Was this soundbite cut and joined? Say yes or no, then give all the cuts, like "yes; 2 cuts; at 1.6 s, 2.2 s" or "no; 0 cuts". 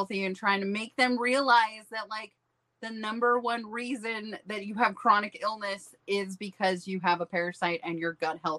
no; 0 cuts